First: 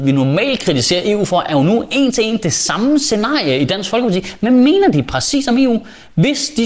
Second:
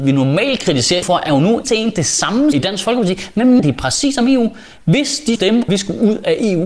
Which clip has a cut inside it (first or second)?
second